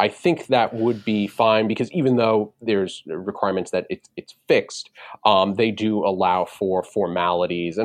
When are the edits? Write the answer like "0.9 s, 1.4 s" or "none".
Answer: none